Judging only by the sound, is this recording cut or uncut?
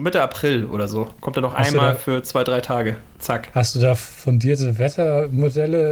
cut